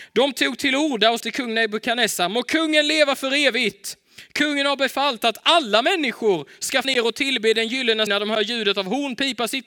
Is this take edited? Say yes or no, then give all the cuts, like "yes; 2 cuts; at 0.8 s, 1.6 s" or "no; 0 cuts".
yes; 3 cuts; at 1.2 s, 6.8 s, 8.1 s